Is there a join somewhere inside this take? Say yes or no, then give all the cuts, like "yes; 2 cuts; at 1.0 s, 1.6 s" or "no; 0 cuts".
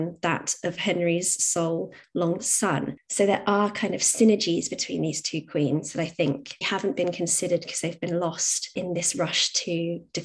yes; 2 cuts; at 2.4 s, 6.6 s